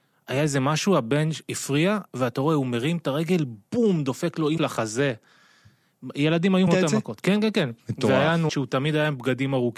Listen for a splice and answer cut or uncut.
cut